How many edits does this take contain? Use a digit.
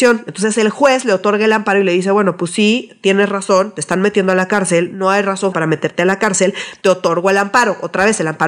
1